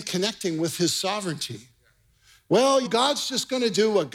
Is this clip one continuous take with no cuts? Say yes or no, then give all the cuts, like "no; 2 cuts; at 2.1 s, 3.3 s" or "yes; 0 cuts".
no; 1 cut; at 2.9 s